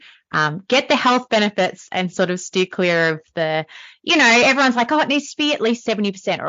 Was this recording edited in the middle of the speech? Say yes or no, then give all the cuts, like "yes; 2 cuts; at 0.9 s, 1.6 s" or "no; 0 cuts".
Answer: no; 0 cuts